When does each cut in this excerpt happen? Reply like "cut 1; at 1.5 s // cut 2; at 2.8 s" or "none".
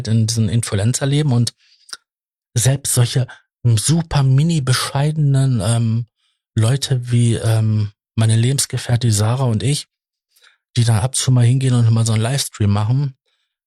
none